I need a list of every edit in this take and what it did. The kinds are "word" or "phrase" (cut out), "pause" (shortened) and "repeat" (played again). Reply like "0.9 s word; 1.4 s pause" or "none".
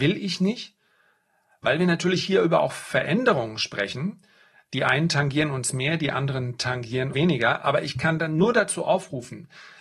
7.1 s word